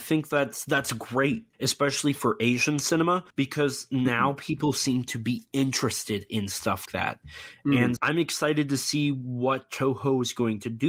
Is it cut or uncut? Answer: cut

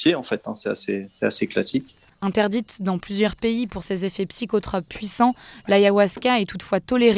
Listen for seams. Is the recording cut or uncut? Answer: uncut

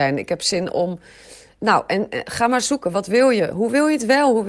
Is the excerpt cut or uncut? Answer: uncut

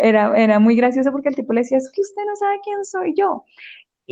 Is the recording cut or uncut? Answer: uncut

